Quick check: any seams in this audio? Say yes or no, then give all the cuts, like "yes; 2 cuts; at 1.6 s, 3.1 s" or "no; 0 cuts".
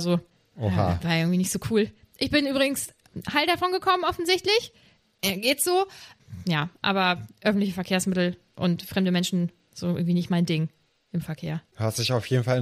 no; 0 cuts